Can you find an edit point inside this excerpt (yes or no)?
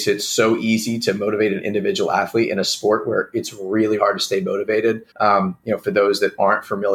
yes